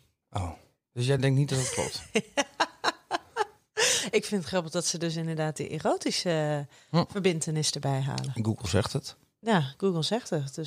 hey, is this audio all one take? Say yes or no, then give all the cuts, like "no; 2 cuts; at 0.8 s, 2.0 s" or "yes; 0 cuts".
yes; 0 cuts